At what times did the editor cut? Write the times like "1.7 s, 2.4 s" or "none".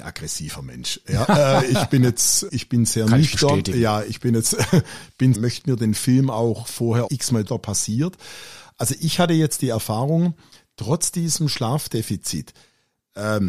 2.5 s, 5.3 s, 7.1 s, 7.5 s